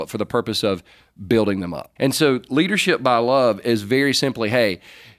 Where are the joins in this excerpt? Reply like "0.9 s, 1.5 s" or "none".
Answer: 2.0 s